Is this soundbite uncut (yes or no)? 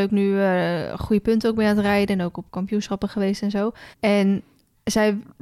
no